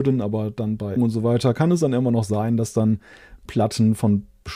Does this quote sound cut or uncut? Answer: cut